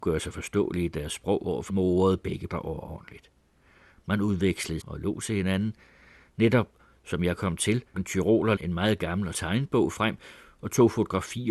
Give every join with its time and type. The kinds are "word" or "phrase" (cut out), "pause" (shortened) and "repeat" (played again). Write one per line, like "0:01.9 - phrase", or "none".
0:01.7 - word
0:02.5 - word
0:04.8 - word
0:07.9 - word
0:08.6 - word
0:09.3 - word